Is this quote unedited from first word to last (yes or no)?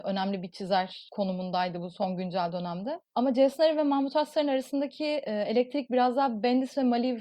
no